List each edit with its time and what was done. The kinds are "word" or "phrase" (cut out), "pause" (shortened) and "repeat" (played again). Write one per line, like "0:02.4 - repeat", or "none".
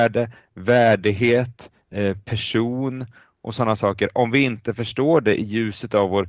none